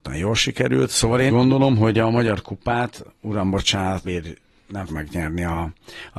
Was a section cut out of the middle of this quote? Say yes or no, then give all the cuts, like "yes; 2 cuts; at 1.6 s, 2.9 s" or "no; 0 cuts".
yes; 3 cuts; at 1.3 s, 4.0 s, 4.9 s